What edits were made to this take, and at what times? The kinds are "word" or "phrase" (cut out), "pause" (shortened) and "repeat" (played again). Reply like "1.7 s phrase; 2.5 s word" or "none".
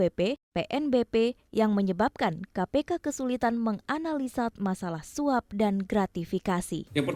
4.5 s word